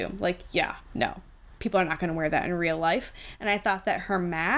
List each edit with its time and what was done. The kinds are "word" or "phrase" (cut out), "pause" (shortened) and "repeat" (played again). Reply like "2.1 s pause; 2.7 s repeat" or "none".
none